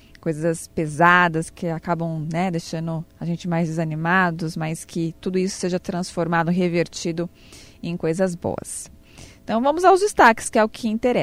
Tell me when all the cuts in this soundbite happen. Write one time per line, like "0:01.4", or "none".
none